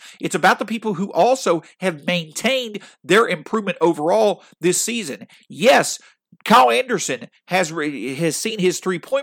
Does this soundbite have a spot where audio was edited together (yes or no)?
no